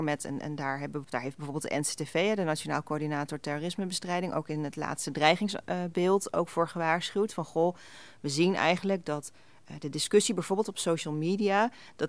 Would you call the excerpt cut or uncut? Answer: cut